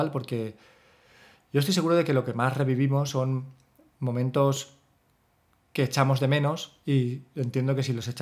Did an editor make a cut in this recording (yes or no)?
no